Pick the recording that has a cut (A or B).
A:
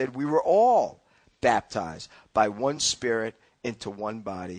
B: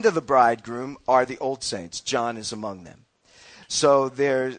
B